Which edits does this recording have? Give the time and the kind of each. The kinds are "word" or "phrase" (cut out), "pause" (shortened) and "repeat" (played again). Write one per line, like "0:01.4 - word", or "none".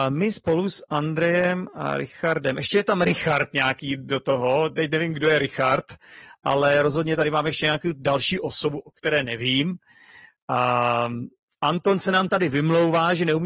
none

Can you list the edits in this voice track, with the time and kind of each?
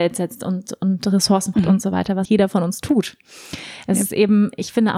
0:01.5 - word
0:02.2 - word

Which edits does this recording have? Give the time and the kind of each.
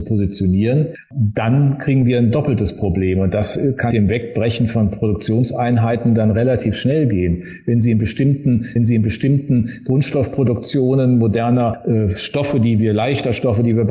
0:03.9 - word
0:08.8 - repeat

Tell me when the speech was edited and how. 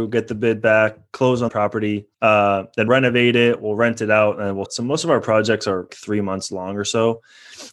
0:01.5 - word
0:02.1 - pause
0:02.9 - word
0:04.7 - word
0:05.9 - word

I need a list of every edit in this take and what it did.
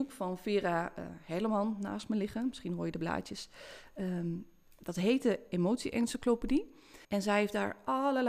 0:07.0 - pause

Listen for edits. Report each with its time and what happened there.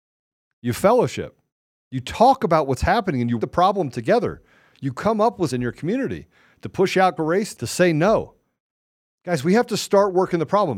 0:03.4 - word
0:05.5 - word
0:07.2 - word
0:07.5 - word

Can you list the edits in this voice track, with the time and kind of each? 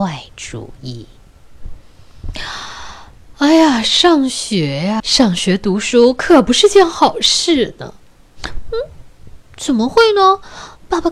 0:05.0 - word

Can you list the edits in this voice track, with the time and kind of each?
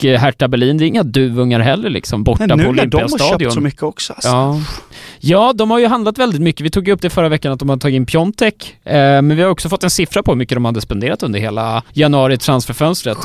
0:11.9 - pause

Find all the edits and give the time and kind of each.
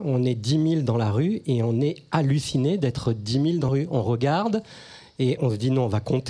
0:03.7 - word
0:05.4 - word

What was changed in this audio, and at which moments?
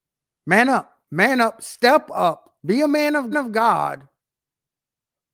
0:01.0 - pause
0:02.6 - pause
0:03.3 - repeat

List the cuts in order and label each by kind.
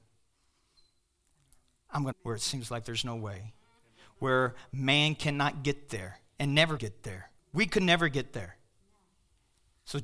0:02.1 - phrase
0:06.8 - word
0:07.4 - pause

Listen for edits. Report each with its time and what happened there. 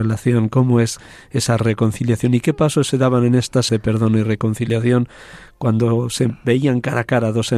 0:03.7 - word

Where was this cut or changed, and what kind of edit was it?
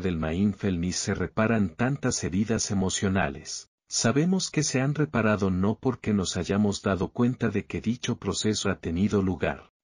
0:08.6 - word

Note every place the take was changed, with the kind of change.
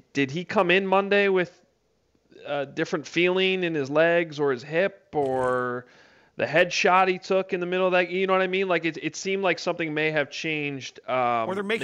none

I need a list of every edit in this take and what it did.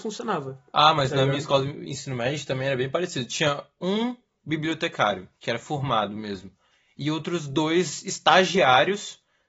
none

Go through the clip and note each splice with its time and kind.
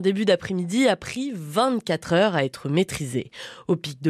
none

